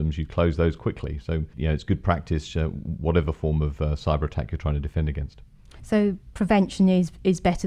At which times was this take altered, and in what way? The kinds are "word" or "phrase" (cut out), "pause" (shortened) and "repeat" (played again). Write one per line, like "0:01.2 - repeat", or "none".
0:01.5 - pause

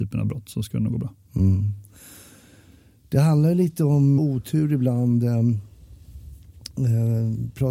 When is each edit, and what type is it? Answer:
0:01.2 - pause
0:04.2 - phrase

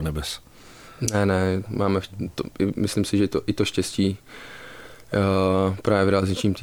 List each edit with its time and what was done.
0:01.7 - word

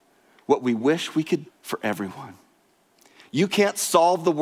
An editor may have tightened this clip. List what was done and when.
0:01.5 - word

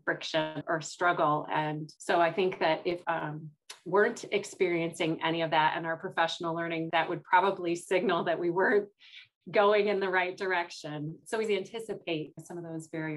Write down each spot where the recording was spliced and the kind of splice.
0:02.0 - pause
0:03.0 - word
0:06.9 - word
0:11.4 - word

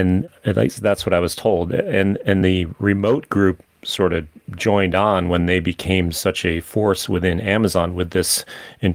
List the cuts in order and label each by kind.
0:02.4 - word

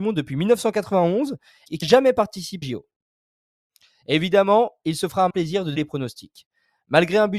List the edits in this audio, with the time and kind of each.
0:01.8 - word
0:02.6 - word
0:05.3 - word
0:05.8 - word

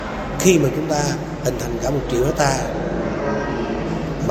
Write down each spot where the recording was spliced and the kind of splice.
none

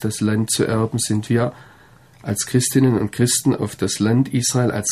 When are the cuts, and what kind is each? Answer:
none

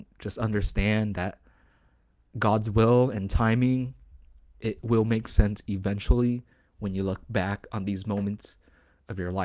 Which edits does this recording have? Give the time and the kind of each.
none

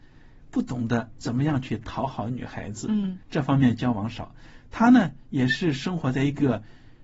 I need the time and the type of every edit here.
0:03.2 - pause

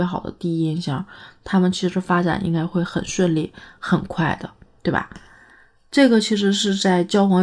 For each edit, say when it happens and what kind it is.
none

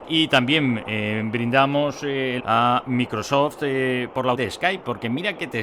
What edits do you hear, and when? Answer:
0:02.4 - word
0:04.3 - word

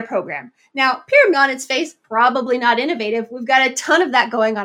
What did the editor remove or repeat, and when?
0:01.3 - word
0:02.0 - pause

